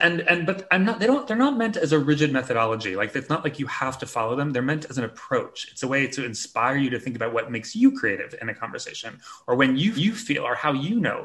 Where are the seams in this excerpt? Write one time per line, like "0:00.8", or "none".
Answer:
0:10.0